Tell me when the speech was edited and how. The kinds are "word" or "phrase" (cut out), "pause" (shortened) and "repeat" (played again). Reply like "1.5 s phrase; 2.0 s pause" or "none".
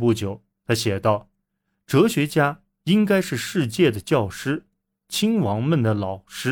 none